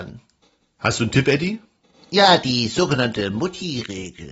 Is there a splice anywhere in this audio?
no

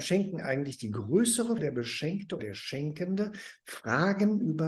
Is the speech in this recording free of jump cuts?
no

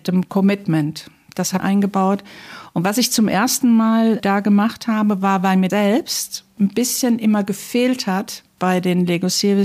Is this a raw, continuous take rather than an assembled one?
no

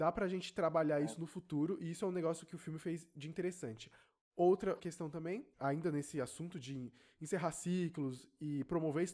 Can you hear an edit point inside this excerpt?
yes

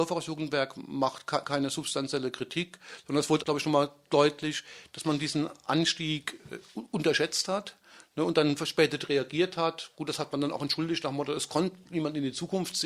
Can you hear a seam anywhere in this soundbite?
yes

